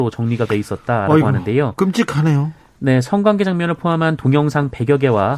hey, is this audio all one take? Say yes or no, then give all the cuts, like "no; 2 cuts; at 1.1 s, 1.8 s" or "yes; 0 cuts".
yes; 0 cuts